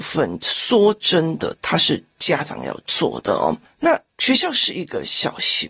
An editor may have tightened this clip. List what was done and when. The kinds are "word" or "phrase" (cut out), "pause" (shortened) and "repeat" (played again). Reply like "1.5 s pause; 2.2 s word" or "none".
4.1 s pause